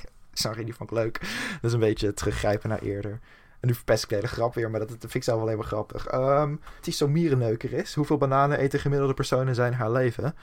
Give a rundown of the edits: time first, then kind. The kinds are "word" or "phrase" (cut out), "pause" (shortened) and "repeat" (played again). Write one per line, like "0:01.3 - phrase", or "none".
0:06.8 - phrase